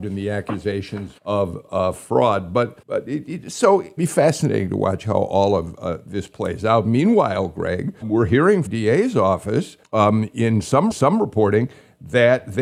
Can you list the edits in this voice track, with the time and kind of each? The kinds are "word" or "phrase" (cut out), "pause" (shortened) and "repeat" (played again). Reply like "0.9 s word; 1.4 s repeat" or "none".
1.2 s pause; 2.8 s pause; 4.0 s phrase; 8.0 s word; 8.7 s phrase; 9.8 s pause; 10.9 s repeat